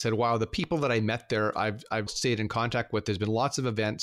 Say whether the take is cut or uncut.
cut